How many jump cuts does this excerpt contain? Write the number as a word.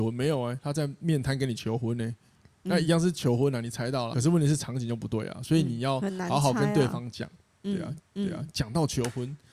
two